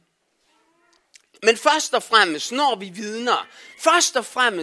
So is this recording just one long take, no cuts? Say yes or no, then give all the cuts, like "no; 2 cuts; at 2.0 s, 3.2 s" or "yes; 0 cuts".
yes; 0 cuts